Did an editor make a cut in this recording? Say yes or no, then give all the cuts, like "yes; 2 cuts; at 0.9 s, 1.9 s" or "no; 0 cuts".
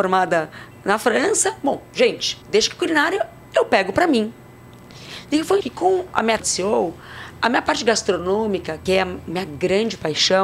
yes; 4 cuts; at 2.4 s, 5.6 s, 6.4 s, 8.9 s